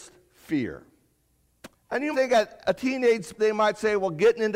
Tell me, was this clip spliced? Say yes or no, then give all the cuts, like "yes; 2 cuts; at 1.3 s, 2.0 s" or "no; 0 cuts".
yes; 4 cuts; at 1.7 s, 2.1 s, 2.6 s, 3.4 s